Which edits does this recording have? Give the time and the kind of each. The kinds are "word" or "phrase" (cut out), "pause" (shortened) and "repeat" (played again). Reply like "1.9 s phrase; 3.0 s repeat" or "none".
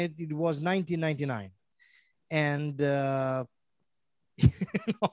none